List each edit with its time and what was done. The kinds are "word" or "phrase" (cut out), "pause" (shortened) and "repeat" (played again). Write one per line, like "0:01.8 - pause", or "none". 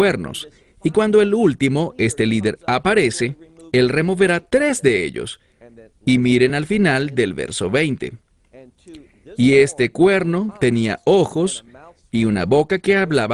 none